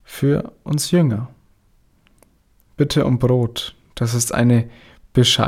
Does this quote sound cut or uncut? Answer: uncut